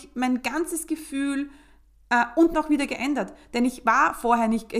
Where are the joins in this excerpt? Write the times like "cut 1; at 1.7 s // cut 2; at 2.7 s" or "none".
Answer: cut 1; at 2.5 s